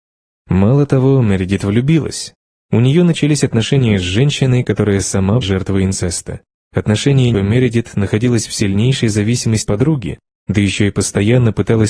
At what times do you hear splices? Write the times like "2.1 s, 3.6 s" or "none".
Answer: 5.4 s, 7.3 s, 9.7 s